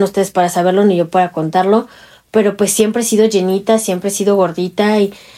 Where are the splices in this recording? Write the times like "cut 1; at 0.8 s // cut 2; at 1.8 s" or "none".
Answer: none